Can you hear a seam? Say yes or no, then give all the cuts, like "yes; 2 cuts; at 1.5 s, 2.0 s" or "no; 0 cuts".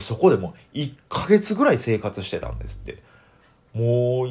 no; 0 cuts